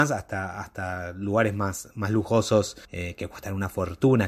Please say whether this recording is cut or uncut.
cut